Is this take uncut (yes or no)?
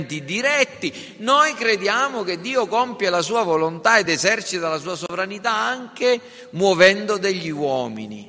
yes